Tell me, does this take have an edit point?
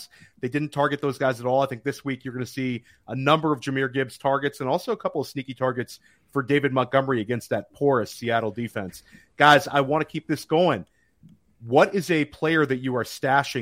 no; 0 cuts

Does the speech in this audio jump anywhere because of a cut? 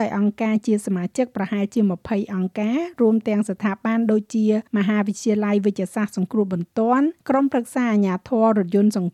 yes; 2 cuts; at 4.7 s, 7.2 s

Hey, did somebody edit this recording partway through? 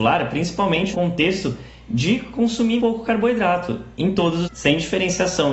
yes; 4 cuts; at 0.9 s, 2.8 s, 3.9 s, 4.4 s

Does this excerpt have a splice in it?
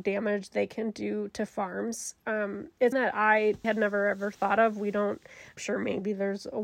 yes; 3 cuts; at 2.9 s, 3.6 s, 5.6 s

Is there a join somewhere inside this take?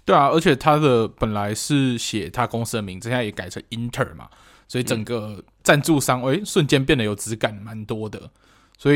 no; 0 cuts

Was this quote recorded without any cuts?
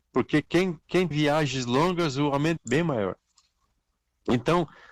no; 2 cuts; at 1.1 s, 2.6 s

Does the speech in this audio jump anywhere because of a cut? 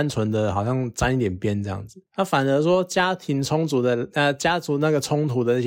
no; 0 cuts

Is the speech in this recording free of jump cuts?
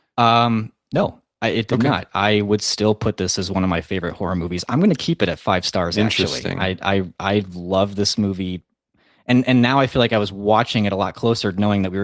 yes; 0 cuts

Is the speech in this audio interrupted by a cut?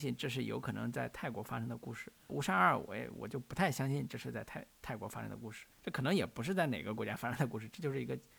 yes; 3 cuts; at 2.3 s, 4.7 s, 5.7 s

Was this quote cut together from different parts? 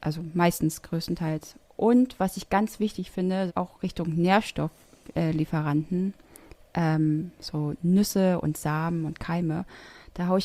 yes; 1 cut; at 3.5 s

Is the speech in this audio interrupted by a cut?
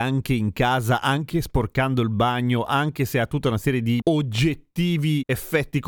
no; 0 cuts

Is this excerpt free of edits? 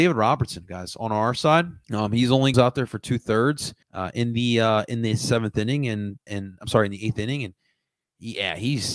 no; 4 cuts; at 1.8 s, 2.5 s, 3.8 s, 6.3 s

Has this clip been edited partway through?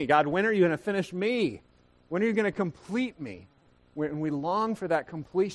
no; 0 cuts

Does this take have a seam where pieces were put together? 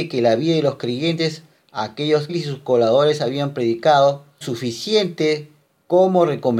yes; 2 cuts; at 2.3 s, 4.4 s

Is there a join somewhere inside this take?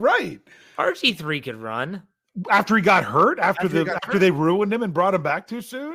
no; 0 cuts

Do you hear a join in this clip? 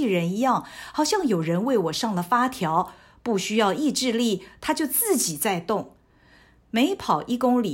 no; 0 cuts

